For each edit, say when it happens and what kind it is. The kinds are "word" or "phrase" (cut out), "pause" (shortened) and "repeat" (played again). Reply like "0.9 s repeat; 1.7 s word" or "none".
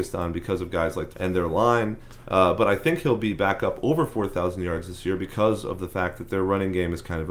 1.1 s phrase